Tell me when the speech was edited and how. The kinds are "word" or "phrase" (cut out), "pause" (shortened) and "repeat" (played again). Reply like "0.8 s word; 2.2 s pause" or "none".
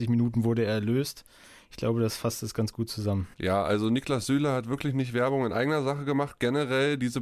3.3 s pause

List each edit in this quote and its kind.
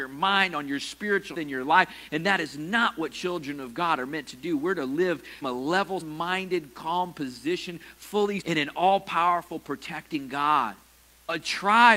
1.3 s word; 5.4 s word; 6.0 s word; 8.4 s word

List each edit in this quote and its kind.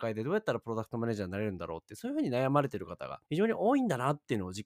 3.2 s pause

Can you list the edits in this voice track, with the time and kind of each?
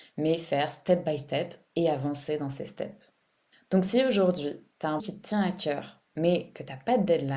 5.0 s word; 6.1 s pause

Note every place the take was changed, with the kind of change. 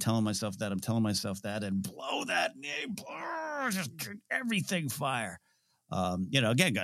none

